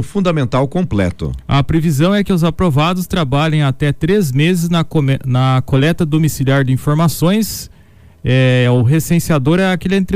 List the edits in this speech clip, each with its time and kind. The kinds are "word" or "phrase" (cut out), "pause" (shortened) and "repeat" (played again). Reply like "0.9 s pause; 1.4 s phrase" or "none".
none